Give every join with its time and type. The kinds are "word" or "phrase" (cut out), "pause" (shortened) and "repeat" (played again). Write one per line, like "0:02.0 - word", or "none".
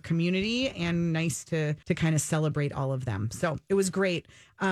0:01.8 - pause